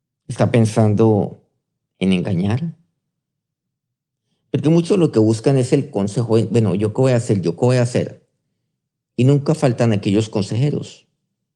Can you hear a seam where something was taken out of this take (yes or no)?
no